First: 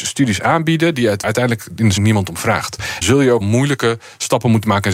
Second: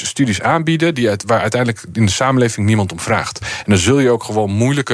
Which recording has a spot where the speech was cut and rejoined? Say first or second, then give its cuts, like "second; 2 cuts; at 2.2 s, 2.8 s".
first; 4 cuts; at 1.2 s, 2.0 s, 3.0 s, 3.4 s